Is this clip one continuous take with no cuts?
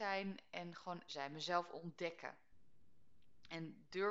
no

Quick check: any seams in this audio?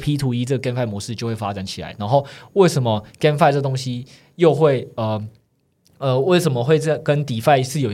no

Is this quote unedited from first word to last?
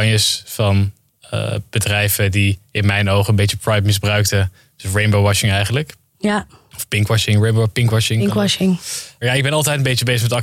yes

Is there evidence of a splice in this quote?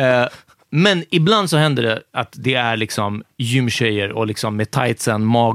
no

